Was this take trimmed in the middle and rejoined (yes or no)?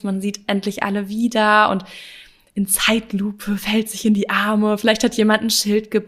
no